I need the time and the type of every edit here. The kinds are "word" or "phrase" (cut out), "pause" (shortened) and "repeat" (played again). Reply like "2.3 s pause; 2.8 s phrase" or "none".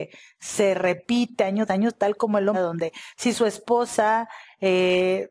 1.7 s word; 2.5 s word